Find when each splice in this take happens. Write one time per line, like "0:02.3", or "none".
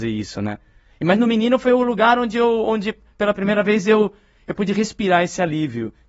none